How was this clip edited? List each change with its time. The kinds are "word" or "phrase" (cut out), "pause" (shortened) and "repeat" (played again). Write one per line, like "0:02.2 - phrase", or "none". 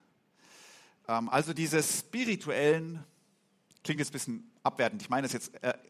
none